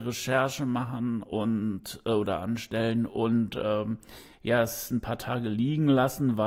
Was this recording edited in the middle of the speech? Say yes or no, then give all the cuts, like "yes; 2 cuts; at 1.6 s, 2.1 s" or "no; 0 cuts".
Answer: no; 0 cuts